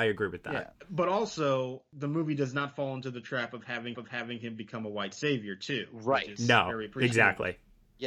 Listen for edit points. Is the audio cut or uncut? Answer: cut